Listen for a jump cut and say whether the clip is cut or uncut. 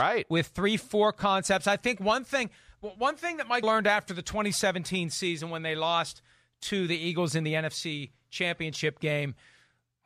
cut